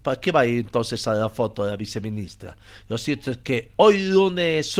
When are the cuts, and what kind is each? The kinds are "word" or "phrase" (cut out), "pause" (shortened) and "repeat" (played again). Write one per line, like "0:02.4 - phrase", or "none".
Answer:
none